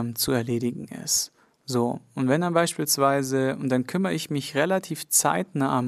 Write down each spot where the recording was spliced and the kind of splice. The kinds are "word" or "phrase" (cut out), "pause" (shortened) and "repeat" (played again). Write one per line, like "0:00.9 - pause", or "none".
none